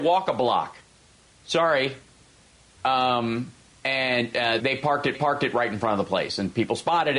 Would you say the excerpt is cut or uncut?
cut